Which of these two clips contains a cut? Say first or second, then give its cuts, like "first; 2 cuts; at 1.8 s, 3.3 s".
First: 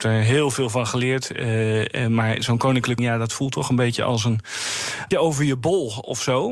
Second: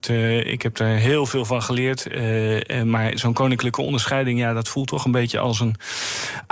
first; 2 cuts; at 3.0 s, 5.1 s